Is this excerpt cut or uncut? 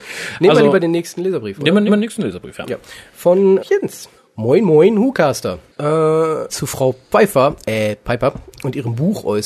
cut